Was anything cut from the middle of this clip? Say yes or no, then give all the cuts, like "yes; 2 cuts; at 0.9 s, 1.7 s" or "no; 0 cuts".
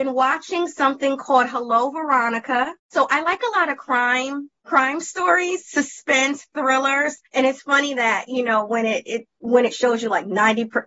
yes; 2 cuts; at 2.8 s, 7.3 s